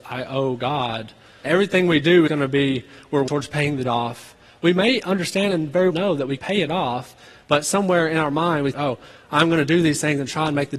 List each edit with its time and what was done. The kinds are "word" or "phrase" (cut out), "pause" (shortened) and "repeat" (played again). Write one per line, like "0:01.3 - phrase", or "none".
0:01.4 - word
0:02.3 - word
0:03.3 - word
0:03.8 - word
0:05.9 - word
0:06.4 - word
0:08.7 - word